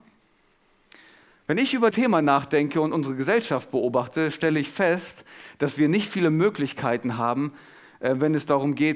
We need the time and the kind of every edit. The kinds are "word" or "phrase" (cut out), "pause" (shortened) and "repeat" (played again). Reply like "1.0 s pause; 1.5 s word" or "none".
1.9 s word